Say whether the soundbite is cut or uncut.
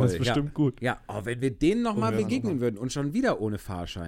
uncut